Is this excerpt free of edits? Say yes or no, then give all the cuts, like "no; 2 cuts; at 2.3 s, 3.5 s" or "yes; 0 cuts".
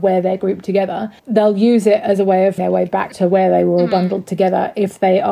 no; 2 cuts; at 1.2 s, 2.6 s